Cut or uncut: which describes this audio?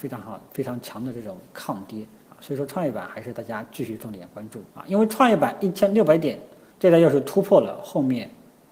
cut